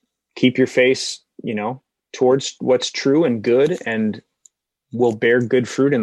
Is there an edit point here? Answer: no; 0 cuts

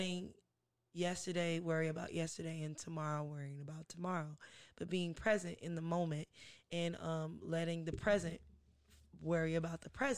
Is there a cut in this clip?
no; 0 cuts

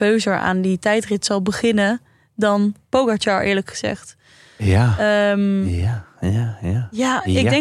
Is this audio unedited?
yes; 0 cuts

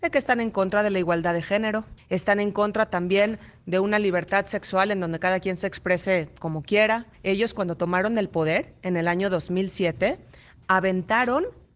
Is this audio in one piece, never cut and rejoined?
no; 2 cuts; at 2.0 s, 7.1 s

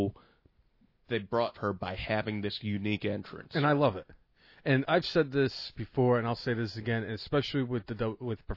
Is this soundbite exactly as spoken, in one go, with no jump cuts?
no; 2 cuts; at 1.5 s, 4.8 s

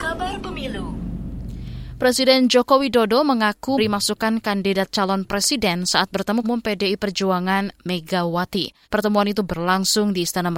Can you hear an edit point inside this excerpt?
yes; 3 cuts; at 3.8 s, 6.4 s, 8.8 s

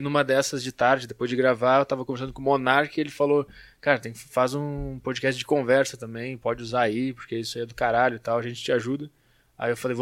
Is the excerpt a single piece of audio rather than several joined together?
yes; 0 cuts

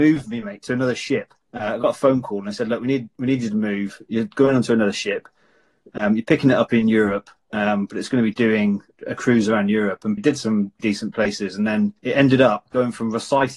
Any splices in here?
yes; 4 cuts; at 1.4 s, 10.2 s, 10.8 s, 12.0 s

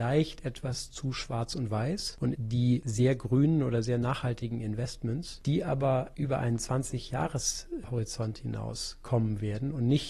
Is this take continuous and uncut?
no; 1 cut; at 2.3 s

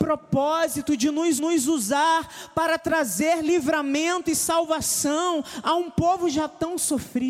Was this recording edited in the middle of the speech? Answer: yes; 1 cut; at 1.4 s

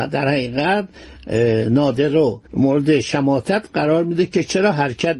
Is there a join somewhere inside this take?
yes; 1 cut; at 2.5 s

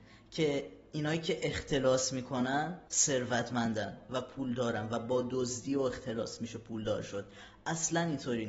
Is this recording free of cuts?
no; 1 cut; at 2.9 s

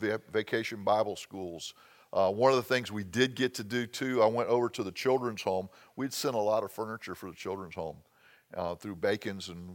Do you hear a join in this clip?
no; 0 cuts

